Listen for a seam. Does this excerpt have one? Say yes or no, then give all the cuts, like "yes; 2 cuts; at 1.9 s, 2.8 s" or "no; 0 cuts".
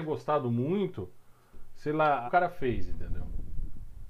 yes; 1 cut; at 2.3 s